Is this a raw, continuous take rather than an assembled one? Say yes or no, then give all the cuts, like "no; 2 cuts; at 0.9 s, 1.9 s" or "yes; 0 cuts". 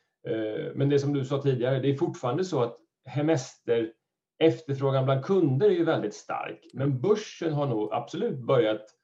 yes; 0 cuts